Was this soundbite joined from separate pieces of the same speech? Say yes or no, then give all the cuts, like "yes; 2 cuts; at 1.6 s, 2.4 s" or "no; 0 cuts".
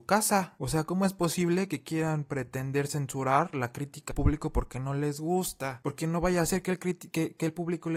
yes; 1 cut; at 4.1 s